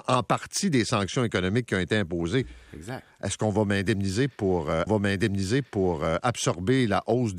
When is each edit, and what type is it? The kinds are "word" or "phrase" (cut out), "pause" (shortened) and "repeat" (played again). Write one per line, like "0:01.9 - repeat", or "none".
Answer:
0:04.9 - repeat